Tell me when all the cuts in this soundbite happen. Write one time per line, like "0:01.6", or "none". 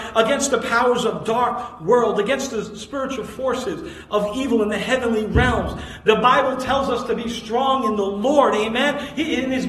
none

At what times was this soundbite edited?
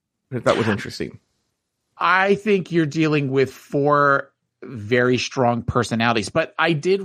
none

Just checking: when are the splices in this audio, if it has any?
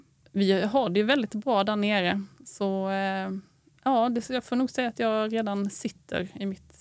none

